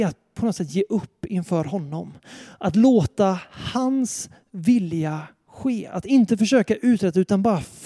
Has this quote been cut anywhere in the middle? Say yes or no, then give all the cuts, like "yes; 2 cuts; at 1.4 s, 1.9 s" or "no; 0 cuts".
no; 0 cuts